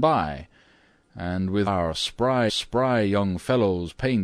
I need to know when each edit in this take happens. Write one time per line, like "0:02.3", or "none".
0:01.7
0:02.5